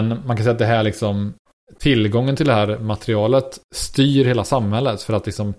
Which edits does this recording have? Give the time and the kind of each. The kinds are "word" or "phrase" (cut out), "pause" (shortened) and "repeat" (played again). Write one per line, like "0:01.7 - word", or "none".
none